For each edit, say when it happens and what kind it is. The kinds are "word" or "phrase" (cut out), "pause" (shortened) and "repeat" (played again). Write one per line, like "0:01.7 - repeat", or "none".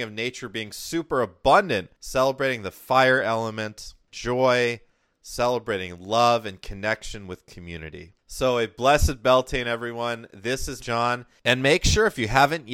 0:04.1 - word
0:10.8 - word